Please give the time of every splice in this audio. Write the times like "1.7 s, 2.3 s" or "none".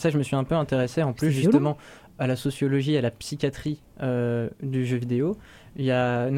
none